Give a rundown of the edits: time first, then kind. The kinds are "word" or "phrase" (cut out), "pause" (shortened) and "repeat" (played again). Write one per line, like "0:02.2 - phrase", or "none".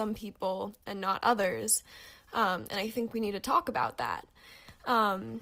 none